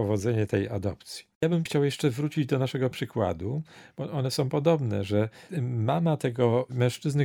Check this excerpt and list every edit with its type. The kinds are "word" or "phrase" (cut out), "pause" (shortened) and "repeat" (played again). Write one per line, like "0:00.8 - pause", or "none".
0:01.7 - word
0:02.9 - word

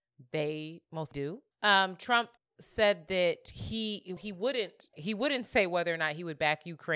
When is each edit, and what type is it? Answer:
0:01.1 - word
0:01.5 - pause
0:02.4 - pause
0:04.2 - word
0:04.9 - word

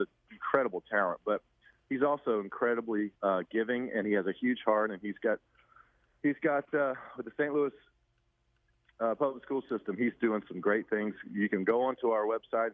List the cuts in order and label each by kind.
0:03.2 - pause

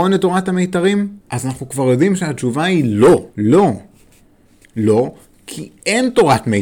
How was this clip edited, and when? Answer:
0:01.2 - pause
0:03.3 - pause

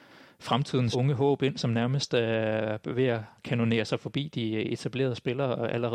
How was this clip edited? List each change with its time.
0:00.9 - word

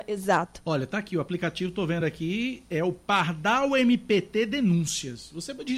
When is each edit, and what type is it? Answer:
none

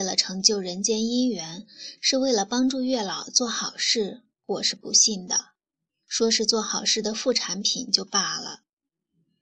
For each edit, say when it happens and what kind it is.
0:05.9 - pause

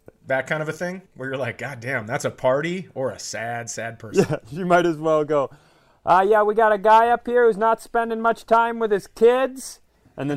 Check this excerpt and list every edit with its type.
0:01.1 - pause

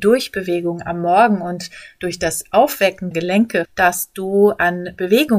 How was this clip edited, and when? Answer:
0:03.1 - word
0:03.6 - word

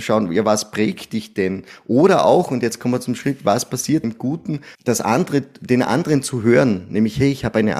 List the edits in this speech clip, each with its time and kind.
0:04.0 - word
0:04.7 - pause

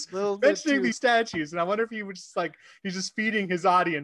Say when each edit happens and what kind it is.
0:00.9 - phrase

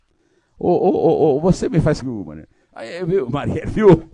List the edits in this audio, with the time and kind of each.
0:02.0 - phrase

